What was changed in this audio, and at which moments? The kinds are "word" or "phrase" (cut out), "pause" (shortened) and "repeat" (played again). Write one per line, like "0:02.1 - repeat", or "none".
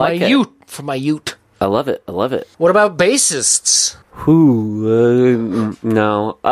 0:02.5 - pause
0:04.0 - pause